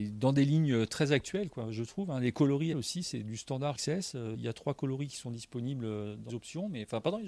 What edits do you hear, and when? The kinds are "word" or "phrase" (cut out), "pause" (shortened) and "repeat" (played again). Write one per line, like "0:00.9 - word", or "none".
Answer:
0:02.7 - word
0:03.7 - word
0:04.3 - word
0:06.3 - word